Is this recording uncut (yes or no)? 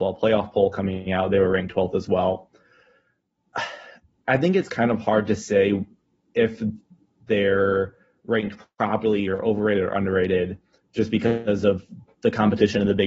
yes